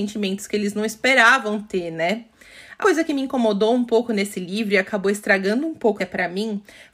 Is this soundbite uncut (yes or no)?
no